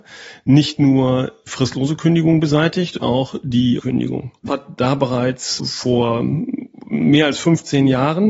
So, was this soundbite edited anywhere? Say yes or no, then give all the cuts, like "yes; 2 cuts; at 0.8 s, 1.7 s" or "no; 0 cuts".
yes; 5 cuts; at 1.5 s, 3.0 s, 3.8 s, 4.5 s, 5.6 s